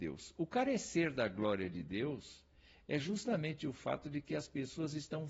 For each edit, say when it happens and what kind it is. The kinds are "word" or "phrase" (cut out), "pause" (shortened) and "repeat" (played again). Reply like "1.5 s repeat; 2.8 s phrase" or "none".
none